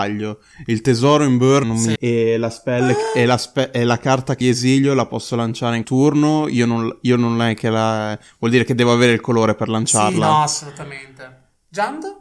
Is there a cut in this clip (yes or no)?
yes